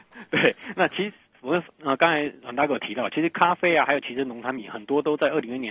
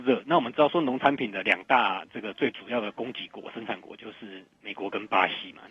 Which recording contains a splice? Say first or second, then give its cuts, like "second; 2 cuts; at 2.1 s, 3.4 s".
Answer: second; 1 cut; at 4.6 s